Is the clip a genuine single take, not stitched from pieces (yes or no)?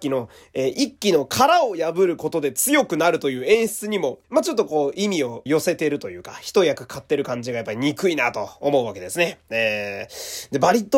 no